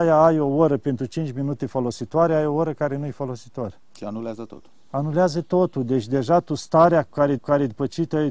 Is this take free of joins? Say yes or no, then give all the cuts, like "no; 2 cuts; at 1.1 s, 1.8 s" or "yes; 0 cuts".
no; 1 cut; at 7.4 s